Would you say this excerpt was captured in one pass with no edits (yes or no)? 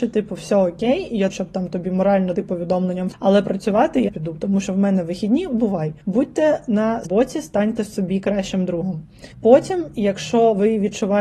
no